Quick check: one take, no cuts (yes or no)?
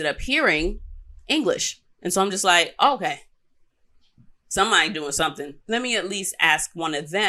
no